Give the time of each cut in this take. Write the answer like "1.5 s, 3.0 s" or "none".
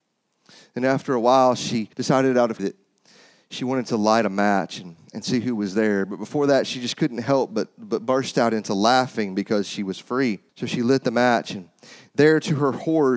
1.9 s, 2.6 s, 10.5 s